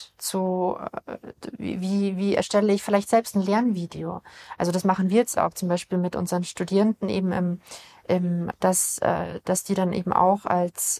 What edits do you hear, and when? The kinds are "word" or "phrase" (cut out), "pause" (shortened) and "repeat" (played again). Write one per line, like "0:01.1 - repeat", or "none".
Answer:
0:08.5 - phrase